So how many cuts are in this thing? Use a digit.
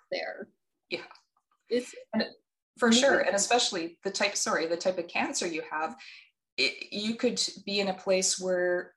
0